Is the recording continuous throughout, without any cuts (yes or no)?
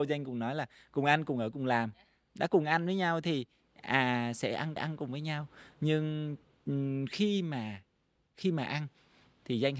no